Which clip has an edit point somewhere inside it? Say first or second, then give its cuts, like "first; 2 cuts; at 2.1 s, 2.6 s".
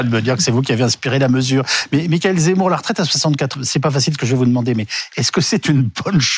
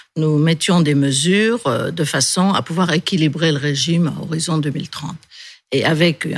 first; 1 cut; at 3.5 s